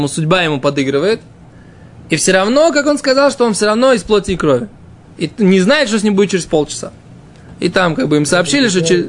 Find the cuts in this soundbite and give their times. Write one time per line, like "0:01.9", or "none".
none